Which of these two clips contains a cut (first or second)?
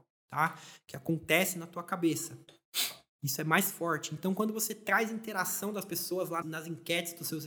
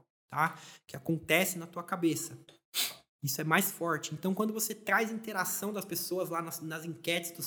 first